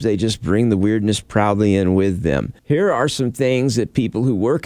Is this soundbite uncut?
no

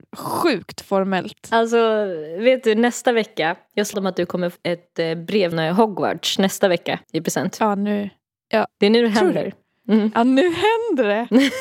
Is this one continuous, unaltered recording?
no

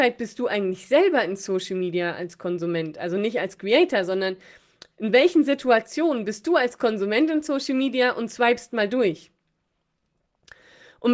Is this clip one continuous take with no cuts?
yes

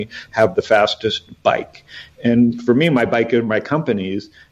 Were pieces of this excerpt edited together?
no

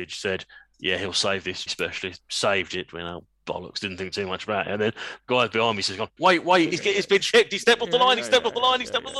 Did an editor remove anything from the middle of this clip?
yes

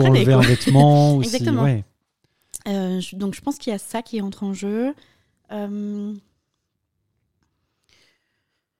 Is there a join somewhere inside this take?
no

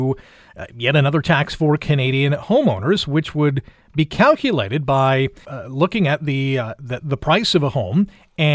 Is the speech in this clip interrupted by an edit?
yes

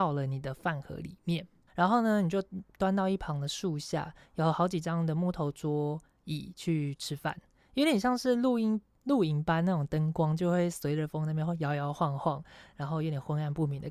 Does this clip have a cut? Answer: yes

